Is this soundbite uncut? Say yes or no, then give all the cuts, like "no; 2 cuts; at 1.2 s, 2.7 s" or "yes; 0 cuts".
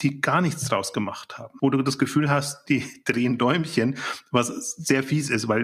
yes; 0 cuts